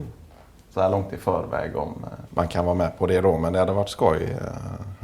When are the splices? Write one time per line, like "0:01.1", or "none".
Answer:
none